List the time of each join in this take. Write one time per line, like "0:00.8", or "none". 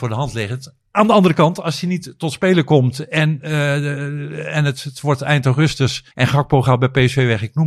0:06.1